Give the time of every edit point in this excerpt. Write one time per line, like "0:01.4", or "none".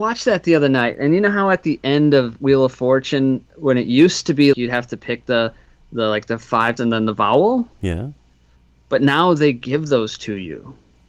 0:04.5
0:06.8